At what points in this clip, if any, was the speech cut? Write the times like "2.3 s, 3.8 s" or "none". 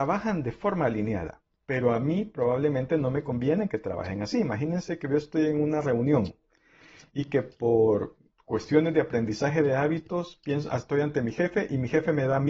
none